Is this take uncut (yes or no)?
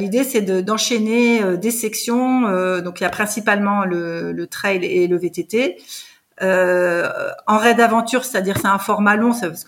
yes